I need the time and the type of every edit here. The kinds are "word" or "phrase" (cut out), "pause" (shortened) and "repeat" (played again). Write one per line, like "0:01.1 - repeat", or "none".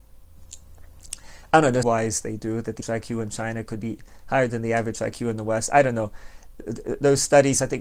0:01.8 - phrase
0:02.8 - word